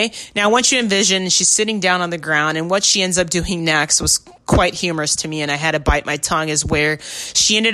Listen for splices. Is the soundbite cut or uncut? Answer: uncut